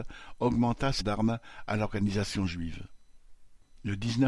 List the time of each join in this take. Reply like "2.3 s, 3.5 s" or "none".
1.0 s

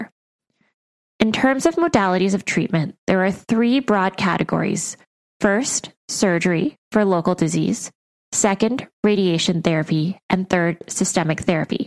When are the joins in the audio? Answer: none

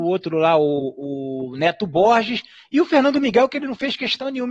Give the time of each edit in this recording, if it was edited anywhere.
none

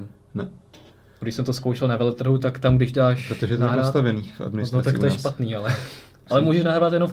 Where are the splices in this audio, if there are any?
none

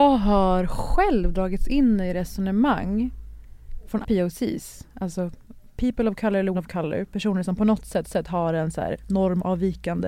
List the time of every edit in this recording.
4.0 s, 6.5 s, 8.0 s

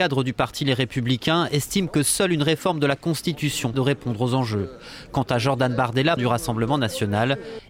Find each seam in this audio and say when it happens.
3.7 s, 6.2 s

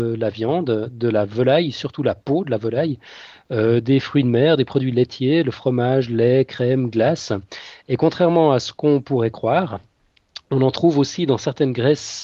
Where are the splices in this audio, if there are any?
none

